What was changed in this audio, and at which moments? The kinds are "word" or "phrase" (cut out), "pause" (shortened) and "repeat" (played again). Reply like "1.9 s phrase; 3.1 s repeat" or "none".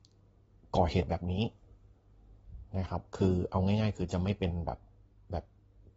3.1 s pause